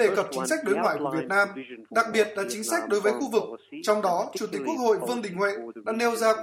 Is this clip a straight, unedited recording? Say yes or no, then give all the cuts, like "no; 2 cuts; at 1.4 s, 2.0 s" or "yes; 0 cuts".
yes; 0 cuts